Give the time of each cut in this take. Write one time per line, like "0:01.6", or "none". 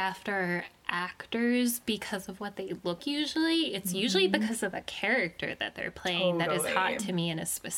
0:03.0

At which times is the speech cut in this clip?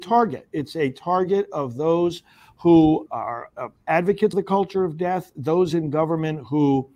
0:03.1
0:04.3

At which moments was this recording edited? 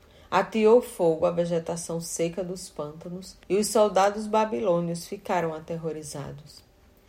0:03.4

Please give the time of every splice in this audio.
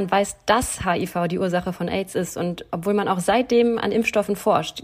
none

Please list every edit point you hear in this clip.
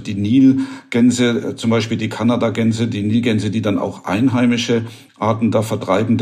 none

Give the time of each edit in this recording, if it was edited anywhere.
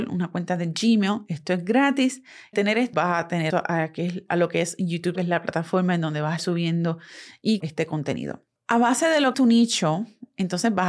0:02.5
0:02.9
0:03.5
0:05.1
0:06.4
0:07.6
0:09.3

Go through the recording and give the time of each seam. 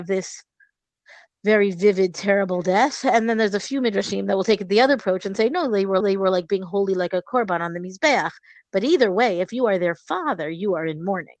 0:06.0

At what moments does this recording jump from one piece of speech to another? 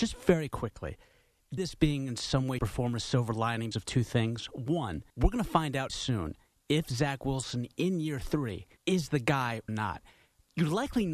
0:01.6
0:02.6
0:03.7
0:05.1
0:05.9
0:08.8
0:09.7

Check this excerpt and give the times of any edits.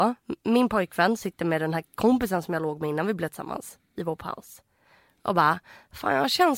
none

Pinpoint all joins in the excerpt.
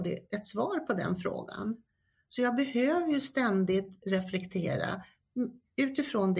none

